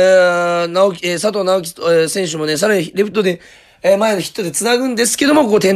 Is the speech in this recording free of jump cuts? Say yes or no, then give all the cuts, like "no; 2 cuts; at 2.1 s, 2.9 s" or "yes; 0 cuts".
yes; 0 cuts